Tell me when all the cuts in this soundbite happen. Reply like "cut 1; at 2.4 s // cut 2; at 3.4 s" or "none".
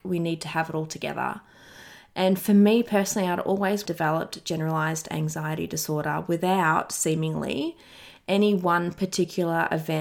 cut 1; at 3.9 s